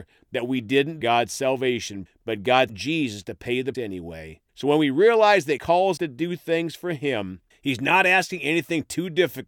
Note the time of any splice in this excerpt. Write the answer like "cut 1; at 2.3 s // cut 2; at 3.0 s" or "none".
cut 1; at 1.0 s // cut 2; at 2.1 s // cut 3; at 2.7 s // cut 4; at 3.7 s // cut 5; at 4.5 s // cut 6; at 5.6 s // cut 7; at 6.0 s // cut 8; at 7.5 s